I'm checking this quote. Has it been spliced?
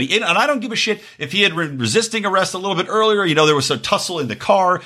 no; 0 cuts

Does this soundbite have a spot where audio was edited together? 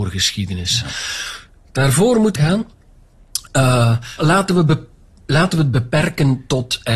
yes; 2 cuts; at 2.4 s, 4.2 s

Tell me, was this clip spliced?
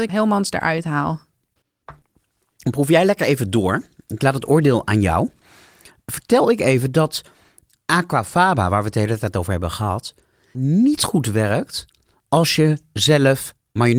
no; 0 cuts

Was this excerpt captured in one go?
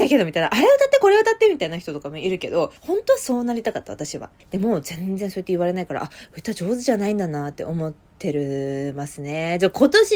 no; 2 cuts; at 2.8 s, 4.4 s

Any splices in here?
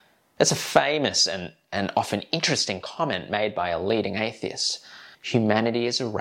yes; 1 cut; at 5.1 s

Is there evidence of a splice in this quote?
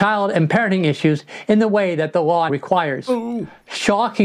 yes; 1 cut; at 2.5 s

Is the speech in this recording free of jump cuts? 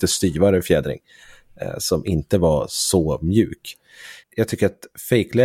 no; 1 cut; at 4.2 s

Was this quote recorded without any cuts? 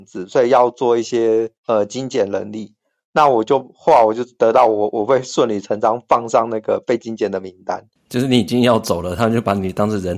no; 2 cuts; at 1.6 s, 8.0 s

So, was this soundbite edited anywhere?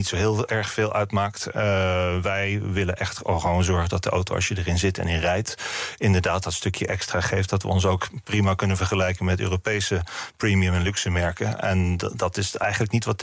no; 0 cuts

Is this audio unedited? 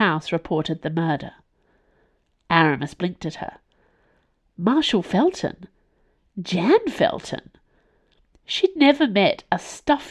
yes; 0 cuts

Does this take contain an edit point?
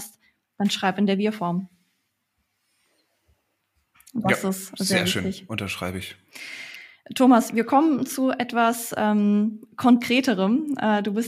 no; 0 cuts

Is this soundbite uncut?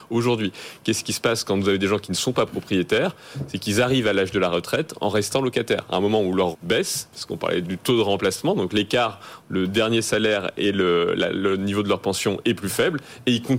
no; 3 cuts; at 6.5 s, 7.6 s, 9.4 s

